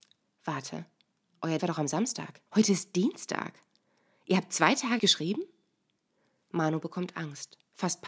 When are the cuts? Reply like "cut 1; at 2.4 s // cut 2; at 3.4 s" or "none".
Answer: cut 1; at 1.6 s // cut 2; at 2.5 s // cut 3; at 5.0 s